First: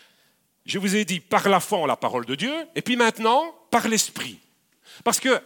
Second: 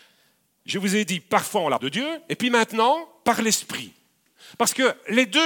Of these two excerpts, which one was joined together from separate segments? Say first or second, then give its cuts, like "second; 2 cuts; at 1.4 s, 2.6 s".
second; 2 cuts; at 1.4 s, 1.8 s